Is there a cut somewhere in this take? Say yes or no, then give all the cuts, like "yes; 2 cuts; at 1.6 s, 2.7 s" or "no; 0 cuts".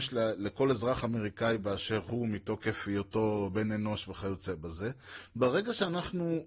no; 0 cuts